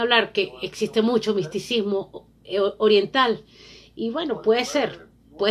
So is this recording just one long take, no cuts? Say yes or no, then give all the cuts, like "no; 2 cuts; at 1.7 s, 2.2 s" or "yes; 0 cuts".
yes; 0 cuts